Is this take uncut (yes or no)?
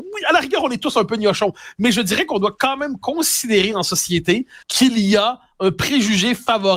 no